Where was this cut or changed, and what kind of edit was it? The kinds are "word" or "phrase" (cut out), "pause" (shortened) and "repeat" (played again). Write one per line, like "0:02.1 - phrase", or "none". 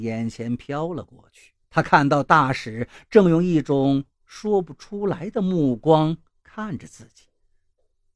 0:01.6 - pause